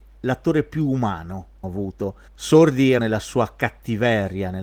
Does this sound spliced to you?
yes; 2 cuts; at 1.6 s, 3.0 s

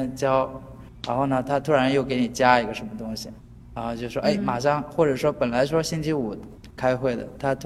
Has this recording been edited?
no; 0 cuts

